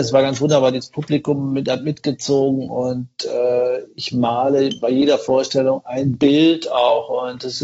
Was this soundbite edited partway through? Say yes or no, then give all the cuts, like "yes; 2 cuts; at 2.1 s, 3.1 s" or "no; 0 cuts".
no; 0 cuts